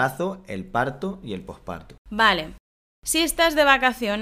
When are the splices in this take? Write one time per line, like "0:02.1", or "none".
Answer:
0:02.0